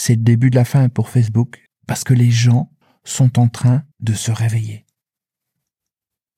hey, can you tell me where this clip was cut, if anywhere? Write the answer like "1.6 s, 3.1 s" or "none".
1.7 s, 2.8 s, 3.9 s